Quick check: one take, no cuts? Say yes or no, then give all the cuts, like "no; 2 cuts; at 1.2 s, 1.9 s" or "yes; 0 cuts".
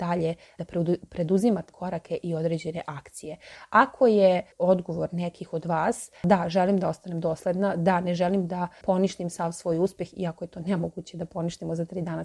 no; 2 cuts; at 1.7 s, 4.5 s